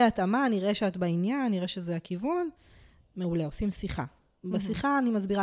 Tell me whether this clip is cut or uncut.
uncut